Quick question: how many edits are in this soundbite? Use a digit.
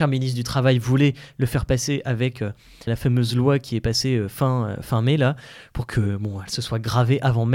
1